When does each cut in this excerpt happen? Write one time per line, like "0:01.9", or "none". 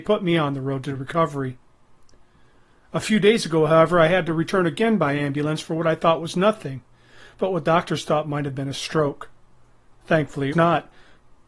0:10.5